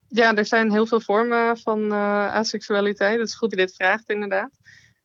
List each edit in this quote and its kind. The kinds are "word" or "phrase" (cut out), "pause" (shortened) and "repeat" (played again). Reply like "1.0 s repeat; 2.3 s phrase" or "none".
1.0 s word; 3.5 s word